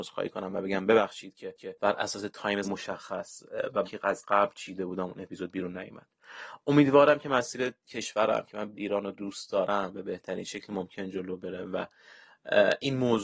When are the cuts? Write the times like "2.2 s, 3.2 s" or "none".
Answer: 1.6 s, 2.6 s, 3.8 s, 8.7 s